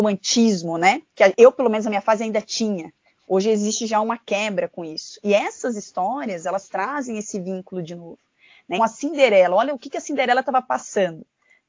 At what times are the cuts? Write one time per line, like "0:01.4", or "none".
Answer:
0:08.8